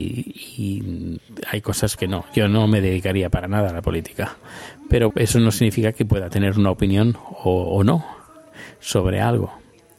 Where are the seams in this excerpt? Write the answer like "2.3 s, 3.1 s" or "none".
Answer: 2.0 s, 5.1 s